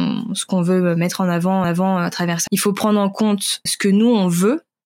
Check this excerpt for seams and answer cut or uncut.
cut